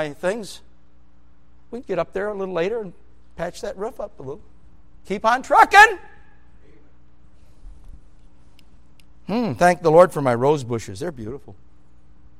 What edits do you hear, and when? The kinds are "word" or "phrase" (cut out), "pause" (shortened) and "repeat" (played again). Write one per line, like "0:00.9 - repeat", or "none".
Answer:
0:01.8 - word
0:05.0 - word